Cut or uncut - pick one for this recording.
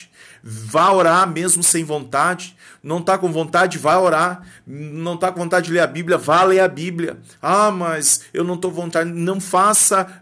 uncut